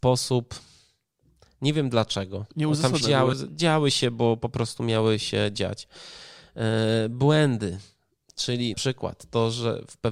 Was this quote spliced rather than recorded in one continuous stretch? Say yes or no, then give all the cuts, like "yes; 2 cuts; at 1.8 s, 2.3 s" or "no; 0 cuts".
yes; 3 cuts; at 3.0 s, 3.3 s, 8.7 s